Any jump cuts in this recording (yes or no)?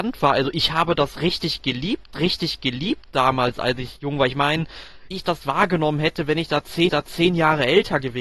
yes